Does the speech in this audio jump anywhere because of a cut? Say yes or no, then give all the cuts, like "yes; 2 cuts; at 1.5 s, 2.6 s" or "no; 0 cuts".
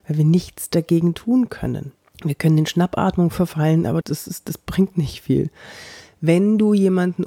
yes; 2 cuts; at 2.1 s, 4.0 s